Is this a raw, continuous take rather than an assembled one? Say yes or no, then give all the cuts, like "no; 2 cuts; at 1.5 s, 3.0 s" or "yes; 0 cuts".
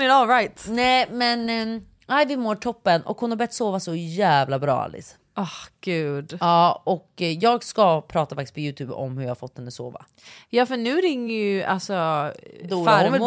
yes; 0 cuts